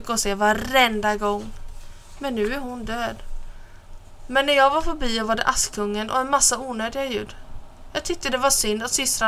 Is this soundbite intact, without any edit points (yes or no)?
yes